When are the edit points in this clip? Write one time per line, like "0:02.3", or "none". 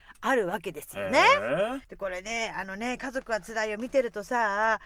0:01.8